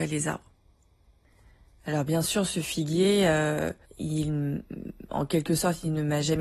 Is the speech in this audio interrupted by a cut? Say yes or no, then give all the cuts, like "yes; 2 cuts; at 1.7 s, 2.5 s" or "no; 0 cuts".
yes; 1 cut; at 3.8 s